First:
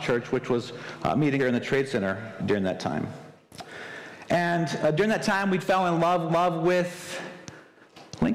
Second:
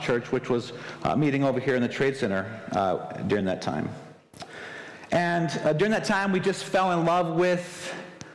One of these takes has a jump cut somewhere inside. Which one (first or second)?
first